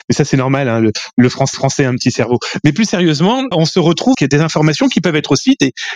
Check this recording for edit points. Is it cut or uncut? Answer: cut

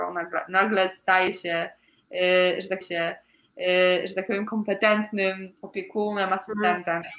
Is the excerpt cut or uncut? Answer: cut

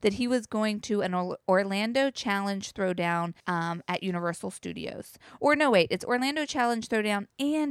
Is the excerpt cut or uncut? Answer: cut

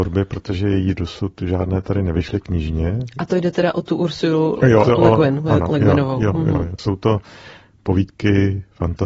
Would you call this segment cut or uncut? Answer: cut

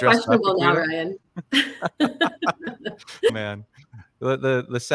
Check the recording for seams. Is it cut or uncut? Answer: cut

